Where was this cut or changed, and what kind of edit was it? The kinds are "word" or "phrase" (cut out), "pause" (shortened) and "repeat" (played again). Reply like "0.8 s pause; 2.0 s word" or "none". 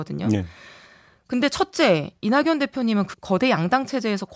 3.1 s word